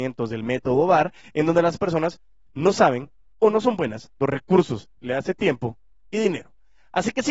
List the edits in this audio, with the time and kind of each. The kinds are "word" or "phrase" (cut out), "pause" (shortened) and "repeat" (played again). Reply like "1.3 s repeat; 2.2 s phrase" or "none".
4.2 s word